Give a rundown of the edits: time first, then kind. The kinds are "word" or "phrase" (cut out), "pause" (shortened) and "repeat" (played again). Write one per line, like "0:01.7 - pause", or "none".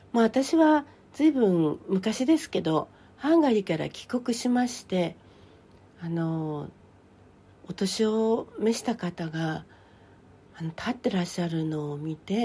none